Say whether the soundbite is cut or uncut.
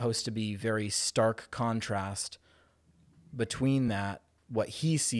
uncut